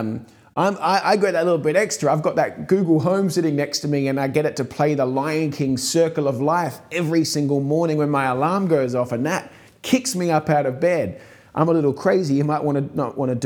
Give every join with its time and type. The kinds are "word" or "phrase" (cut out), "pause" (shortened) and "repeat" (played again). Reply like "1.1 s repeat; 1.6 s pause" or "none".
none